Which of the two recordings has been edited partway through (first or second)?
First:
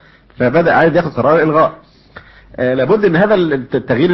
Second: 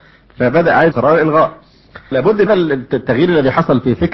second